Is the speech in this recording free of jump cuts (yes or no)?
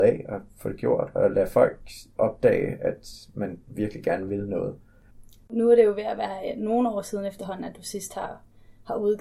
yes